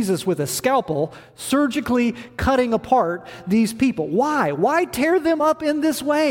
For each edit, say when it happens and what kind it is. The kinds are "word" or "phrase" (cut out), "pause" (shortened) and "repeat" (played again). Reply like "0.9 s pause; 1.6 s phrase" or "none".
none